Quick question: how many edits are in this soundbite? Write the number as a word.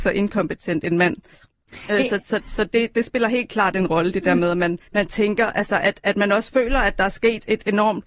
one